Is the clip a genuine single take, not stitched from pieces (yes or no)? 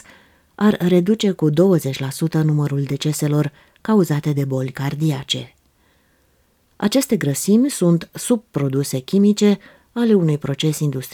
yes